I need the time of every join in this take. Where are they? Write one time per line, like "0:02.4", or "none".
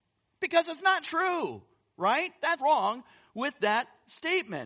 0:01.0
0:02.6